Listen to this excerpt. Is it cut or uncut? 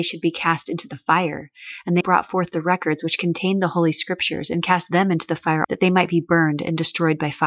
cut